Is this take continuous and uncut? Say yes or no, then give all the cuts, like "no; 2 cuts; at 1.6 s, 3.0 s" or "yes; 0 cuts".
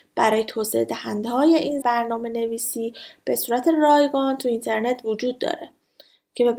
no; 1 cut; at 1.8 s